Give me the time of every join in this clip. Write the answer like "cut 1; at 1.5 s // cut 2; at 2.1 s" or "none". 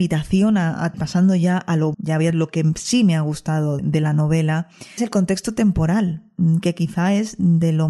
cut 1; at 0.9 s // cut 2; at 1.9 s // cut 3; at 2.3 s // cut 4; at 3.8 s // cut 5; at 5.0 s